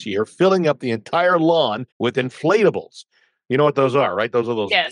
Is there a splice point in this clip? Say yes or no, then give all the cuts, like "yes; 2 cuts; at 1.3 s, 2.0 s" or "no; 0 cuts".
yes; 1 cut; at 1.9 s